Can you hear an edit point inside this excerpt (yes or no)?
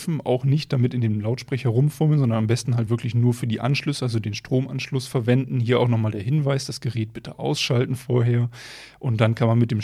no